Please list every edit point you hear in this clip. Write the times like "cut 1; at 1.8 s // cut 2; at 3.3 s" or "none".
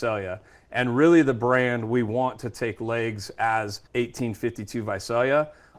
cut 1; at 3.9 s